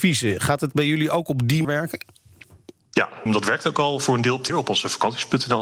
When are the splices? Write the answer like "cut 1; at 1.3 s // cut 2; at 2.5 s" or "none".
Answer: cut 1; at 1.6 s // cut 2; at 3.3 s // cut 3; at 4.5 s